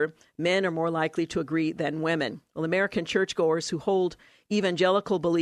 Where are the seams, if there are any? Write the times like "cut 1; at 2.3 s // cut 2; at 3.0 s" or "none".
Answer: none